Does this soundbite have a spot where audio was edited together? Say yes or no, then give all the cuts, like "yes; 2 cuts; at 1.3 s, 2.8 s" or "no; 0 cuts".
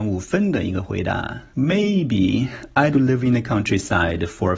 yes; 2 cuts; at 1.5 s, 2.9 s